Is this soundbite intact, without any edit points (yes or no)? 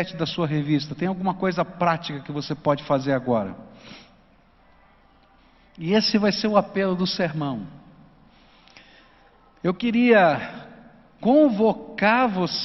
yes